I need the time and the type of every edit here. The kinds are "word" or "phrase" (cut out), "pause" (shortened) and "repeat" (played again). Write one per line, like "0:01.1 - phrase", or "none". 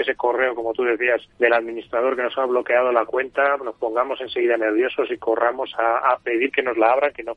0:01.3 - pause